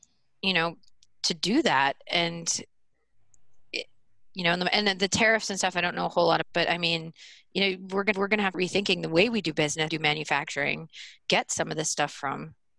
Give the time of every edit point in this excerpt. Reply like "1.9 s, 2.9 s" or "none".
6.4 s, 8.1 s, 8.5 s, 9.9 s, 11.2 s